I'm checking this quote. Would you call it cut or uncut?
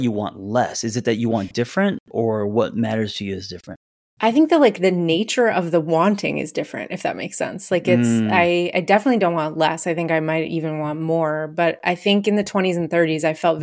uncut